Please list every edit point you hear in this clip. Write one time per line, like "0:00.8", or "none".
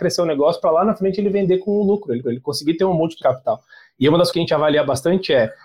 0:02.2
0:03.2
0:04.3